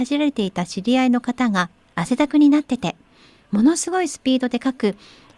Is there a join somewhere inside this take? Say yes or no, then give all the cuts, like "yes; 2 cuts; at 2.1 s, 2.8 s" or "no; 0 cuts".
no; 0 cuts